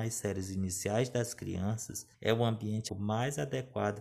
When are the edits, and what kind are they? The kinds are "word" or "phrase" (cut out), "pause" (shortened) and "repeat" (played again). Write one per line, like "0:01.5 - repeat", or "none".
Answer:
0:02.1 - pause
0:02.9 - word